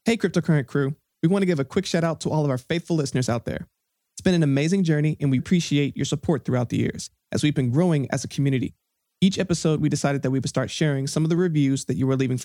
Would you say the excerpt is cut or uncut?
cut